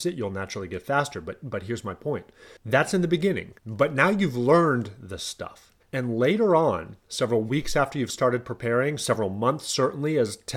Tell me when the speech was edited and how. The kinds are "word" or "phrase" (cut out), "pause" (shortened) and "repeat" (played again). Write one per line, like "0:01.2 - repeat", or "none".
0:02.6 - pause
0:03.6 - pause
0:05.8 - pause